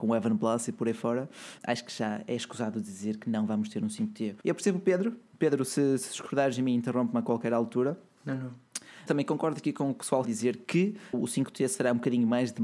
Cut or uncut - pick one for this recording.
cut